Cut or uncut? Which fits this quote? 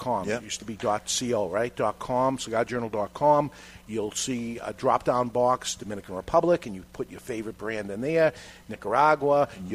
uncut